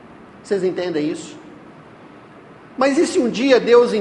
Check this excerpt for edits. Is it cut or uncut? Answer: uncut